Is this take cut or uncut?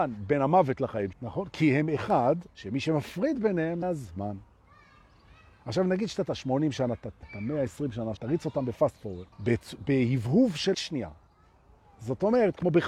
cut